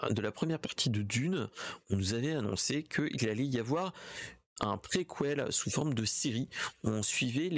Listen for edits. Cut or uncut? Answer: uncut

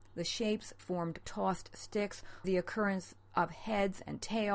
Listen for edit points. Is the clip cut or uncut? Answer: cut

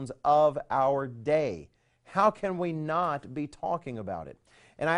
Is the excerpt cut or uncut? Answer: uncut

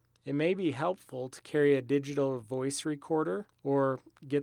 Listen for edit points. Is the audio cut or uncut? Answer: uncut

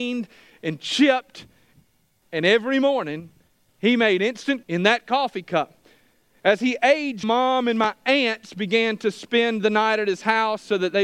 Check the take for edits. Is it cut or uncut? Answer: cut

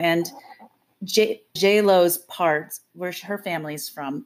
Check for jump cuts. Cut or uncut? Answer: cut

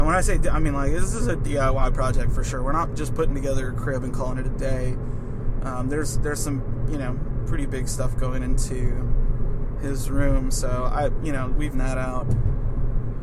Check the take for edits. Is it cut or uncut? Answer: cut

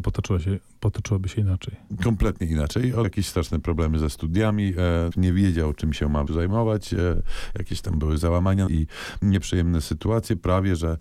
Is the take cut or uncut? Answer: cut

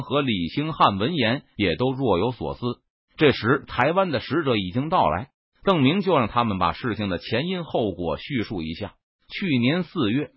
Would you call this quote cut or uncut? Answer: uncut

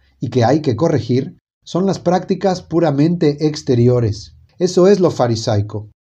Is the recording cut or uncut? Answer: uncut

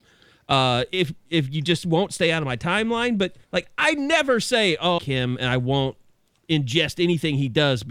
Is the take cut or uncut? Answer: cut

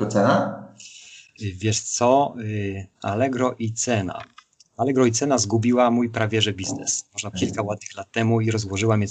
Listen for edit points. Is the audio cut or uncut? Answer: cut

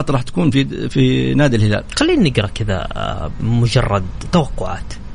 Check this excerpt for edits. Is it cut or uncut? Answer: uncut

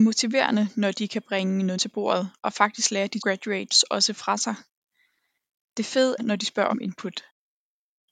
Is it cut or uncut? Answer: cut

